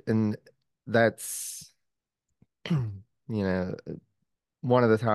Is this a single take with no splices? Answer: yes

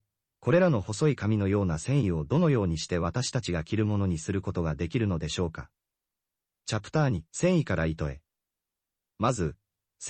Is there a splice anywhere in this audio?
yes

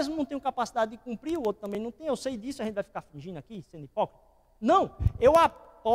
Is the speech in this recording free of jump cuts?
yes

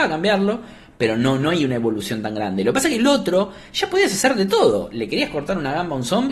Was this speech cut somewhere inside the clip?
no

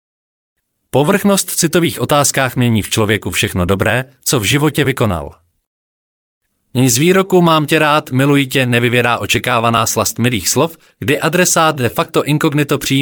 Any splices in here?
no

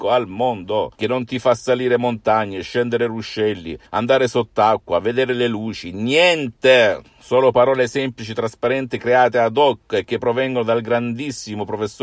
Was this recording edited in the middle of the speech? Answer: yes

